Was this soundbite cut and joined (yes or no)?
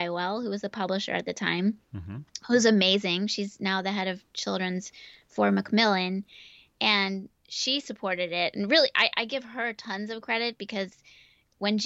no